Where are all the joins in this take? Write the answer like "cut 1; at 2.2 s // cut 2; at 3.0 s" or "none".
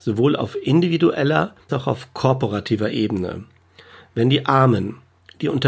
cut 1; at 1.7 s